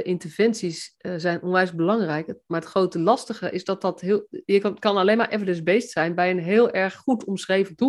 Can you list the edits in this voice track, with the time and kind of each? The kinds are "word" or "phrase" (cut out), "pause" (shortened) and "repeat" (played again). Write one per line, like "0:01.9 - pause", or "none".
none